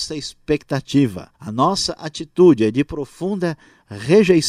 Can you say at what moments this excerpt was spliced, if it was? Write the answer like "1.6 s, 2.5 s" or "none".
1.3 s